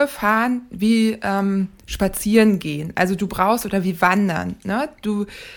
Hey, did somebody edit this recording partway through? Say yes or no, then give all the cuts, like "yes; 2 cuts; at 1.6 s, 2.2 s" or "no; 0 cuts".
no; 0 cuts